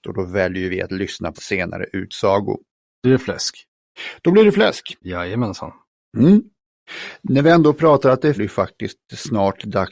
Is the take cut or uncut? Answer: cut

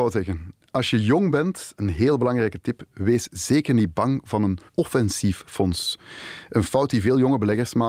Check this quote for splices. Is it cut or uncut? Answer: cut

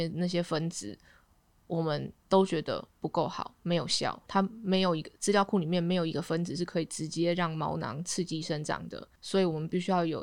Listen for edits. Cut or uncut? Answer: cut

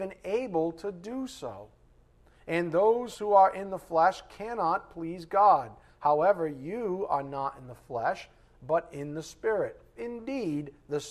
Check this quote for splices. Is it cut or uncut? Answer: cut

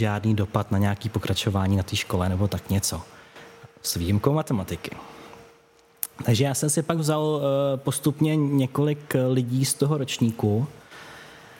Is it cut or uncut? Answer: uncut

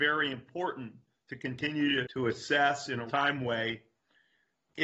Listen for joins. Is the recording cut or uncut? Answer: cut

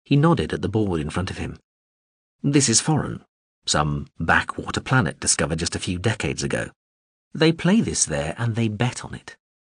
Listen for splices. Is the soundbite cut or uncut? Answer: uncut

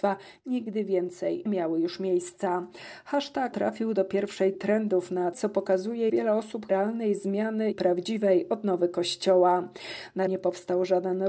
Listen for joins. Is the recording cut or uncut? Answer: cut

